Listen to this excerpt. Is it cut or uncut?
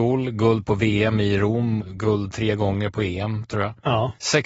cut